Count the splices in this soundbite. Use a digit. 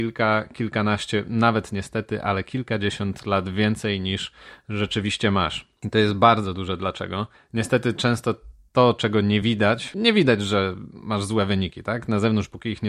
0